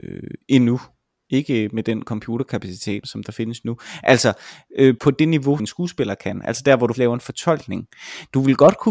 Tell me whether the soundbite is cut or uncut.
cut